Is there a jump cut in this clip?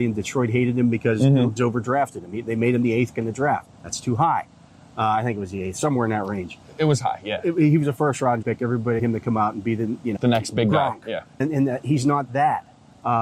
yes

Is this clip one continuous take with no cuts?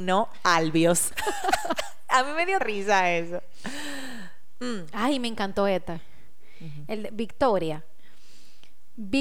no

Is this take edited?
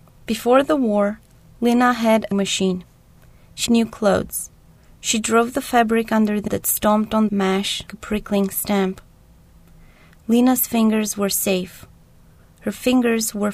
yes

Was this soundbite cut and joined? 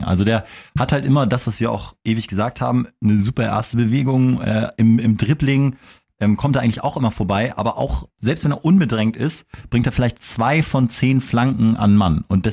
yes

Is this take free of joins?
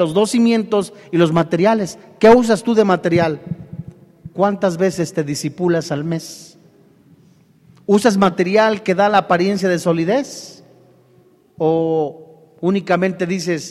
yes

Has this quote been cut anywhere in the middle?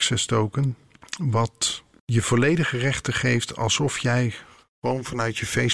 no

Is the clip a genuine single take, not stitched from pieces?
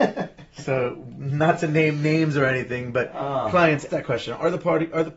no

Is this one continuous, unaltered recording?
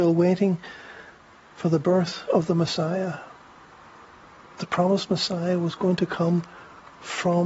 yes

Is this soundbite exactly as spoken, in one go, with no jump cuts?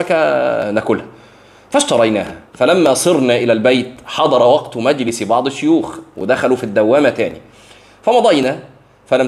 yes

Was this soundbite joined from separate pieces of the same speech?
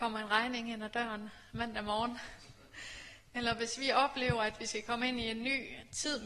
no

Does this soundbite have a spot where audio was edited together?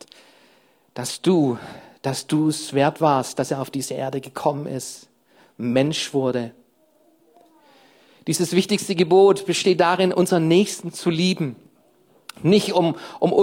no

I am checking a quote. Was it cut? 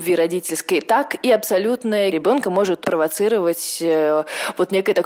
yes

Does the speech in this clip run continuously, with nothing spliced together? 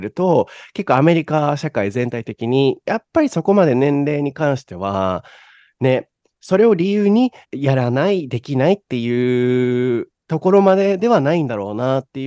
no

